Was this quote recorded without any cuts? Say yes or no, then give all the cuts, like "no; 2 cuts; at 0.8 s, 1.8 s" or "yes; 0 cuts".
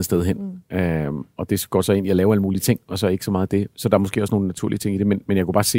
yes; 0 cuts